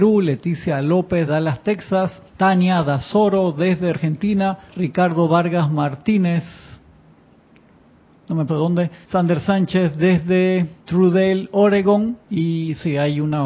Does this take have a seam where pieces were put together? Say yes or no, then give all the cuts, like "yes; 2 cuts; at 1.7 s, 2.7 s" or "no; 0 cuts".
yes; 8 cuts; at 1.3 s, 2.3 s, 3.9 s, 4.7 s, 8.5 s, 9.0 s, 10.8 s, 12.2 s